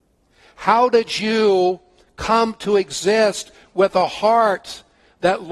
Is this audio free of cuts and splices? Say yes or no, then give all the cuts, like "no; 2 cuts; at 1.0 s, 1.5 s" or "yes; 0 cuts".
yes; 0 cuts